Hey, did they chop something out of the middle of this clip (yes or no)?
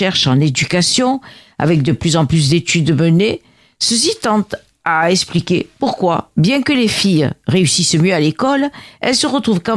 no